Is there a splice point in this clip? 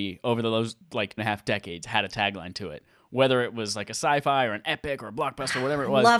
yes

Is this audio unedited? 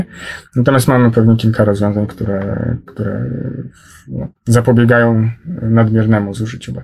no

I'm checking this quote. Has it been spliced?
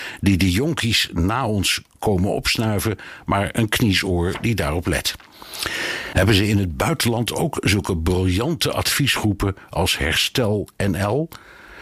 no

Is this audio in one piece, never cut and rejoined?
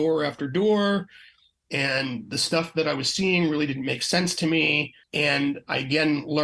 no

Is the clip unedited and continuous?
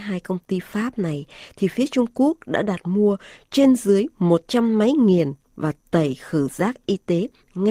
yes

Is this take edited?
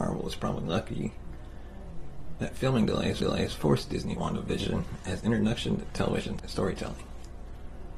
yes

